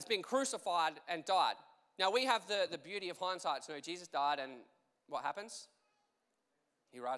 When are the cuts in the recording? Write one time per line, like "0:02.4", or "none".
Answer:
none